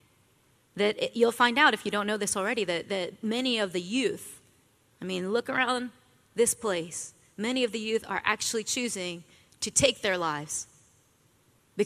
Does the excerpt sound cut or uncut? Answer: uncut